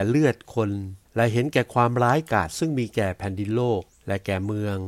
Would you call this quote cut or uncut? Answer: cut